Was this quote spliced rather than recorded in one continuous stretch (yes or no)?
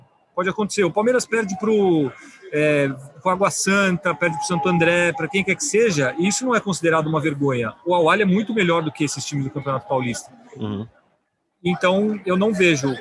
no